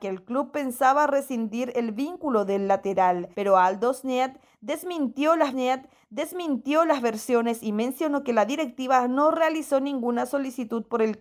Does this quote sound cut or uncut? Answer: cut